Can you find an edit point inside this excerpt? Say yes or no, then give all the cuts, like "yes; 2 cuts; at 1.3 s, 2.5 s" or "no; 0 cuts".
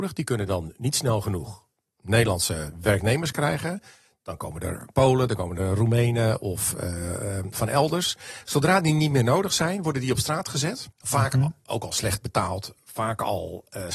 yes; 1 cut; at 10.9 s